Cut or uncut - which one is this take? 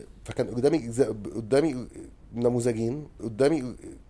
cut